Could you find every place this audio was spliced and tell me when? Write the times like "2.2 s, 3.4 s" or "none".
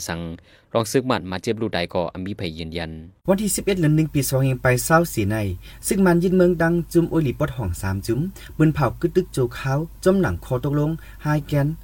3.2 s